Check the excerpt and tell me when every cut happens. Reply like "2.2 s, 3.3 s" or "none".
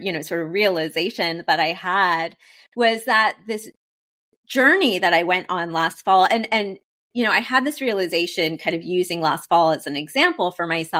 none